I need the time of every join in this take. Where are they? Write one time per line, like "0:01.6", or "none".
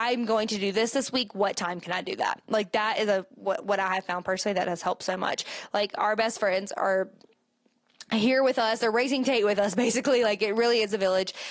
none